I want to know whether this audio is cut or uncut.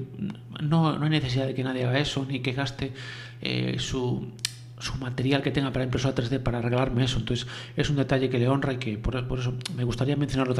uncut